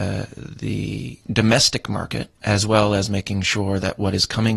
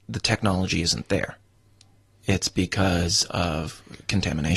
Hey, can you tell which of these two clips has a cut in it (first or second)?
first